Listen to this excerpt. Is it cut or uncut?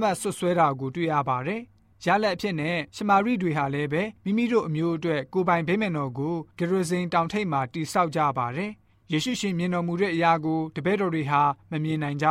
cut